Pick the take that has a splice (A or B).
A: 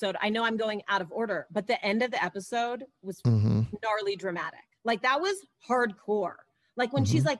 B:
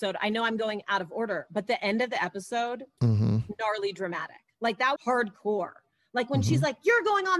B